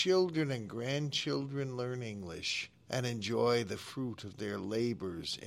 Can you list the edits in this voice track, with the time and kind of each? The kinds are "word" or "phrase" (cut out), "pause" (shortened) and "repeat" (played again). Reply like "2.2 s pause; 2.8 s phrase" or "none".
2.7 s pause